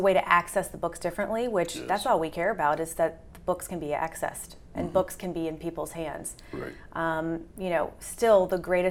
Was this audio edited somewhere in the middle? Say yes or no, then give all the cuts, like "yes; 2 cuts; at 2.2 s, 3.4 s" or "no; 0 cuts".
no; 0 cuts